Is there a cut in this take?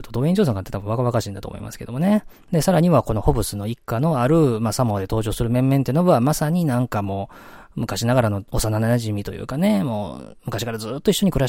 yes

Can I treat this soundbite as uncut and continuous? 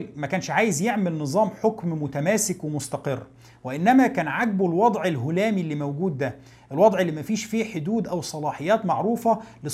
yes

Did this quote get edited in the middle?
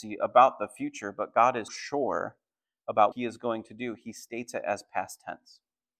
yes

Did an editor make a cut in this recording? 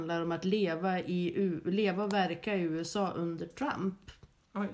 no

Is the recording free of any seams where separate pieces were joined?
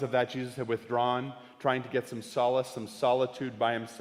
yes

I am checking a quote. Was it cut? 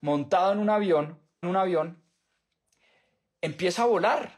yes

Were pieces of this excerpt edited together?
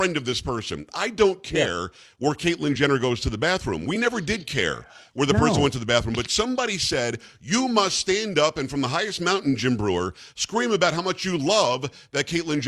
no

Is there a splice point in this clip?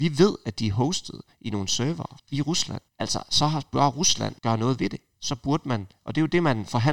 yes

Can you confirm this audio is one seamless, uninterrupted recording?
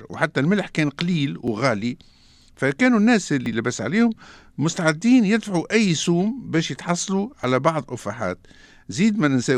yes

